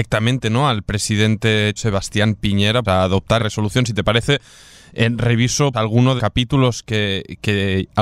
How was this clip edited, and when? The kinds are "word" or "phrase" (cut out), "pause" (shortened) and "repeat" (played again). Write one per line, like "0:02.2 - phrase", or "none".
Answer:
0:01.8 - word
0:02.8 - word
0:03.4 - word
0:05.7 - word
0:06.2 - word